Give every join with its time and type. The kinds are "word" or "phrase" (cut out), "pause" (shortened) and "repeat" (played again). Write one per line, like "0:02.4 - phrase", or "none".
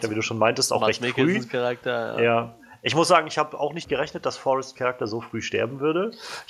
0:03.8 - word
0:04.8 - word